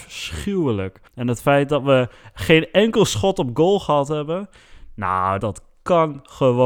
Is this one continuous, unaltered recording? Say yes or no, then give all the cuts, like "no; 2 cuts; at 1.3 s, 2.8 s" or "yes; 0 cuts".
no; 2 cuts; at 1.1 s, 5.4 s